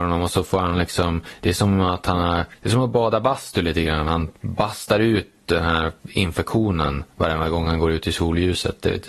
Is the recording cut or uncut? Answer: cut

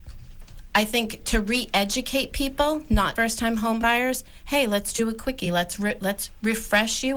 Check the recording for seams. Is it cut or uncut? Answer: cut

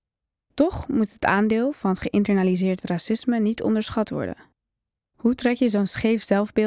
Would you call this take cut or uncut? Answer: uncut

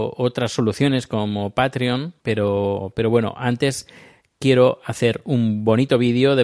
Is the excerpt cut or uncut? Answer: cut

